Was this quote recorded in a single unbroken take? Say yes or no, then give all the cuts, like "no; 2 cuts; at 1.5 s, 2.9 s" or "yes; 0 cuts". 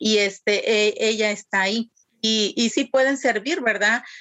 no; 2 cuts; at 2.0 s, 2.7 s